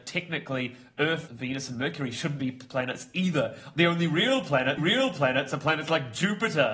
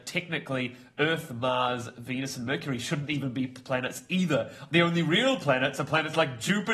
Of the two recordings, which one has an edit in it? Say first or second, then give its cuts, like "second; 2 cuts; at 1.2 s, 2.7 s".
first; 3 cuts; at 1.3 s, 2.4 s, 4.8 s